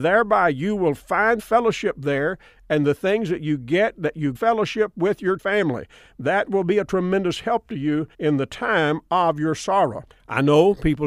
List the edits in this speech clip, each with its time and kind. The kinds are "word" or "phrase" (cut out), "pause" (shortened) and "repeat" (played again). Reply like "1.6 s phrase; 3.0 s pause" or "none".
1.4 s word; 4.3 s phrase; 5.4 s word; 8.1 s pause